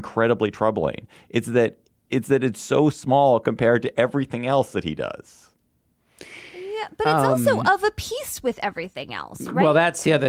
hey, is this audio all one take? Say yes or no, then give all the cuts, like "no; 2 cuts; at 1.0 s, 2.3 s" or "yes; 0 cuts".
yes; 0 cuts